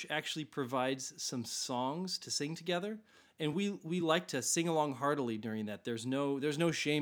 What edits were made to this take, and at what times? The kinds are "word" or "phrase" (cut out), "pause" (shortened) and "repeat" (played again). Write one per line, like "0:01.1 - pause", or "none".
none